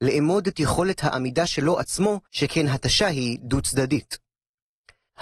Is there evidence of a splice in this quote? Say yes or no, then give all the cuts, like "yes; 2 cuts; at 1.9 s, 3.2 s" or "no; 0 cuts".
yes; 1 cut; at 2.3 s